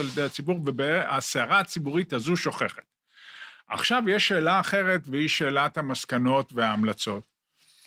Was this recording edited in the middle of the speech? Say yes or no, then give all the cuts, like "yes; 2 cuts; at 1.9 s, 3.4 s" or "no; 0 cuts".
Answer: no; 0 cuts